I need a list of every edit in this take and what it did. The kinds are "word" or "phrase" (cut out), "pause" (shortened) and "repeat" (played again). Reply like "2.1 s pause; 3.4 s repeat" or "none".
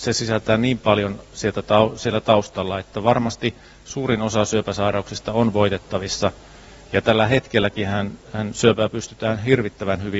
none

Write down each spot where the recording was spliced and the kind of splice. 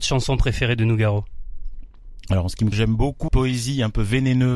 2.7 s word; 3.3 s word

